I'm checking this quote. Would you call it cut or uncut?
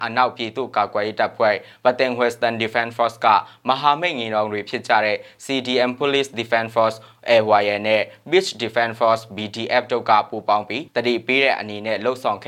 cut